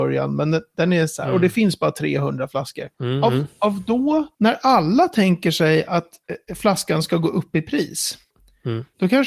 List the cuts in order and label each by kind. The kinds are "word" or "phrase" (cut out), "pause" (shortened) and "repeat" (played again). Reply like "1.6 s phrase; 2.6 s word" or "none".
none